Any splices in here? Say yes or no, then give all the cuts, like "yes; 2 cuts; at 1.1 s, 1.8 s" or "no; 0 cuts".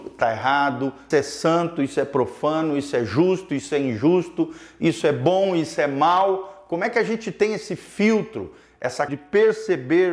yes; 2 cuts; at 1.1 s, 9.1 s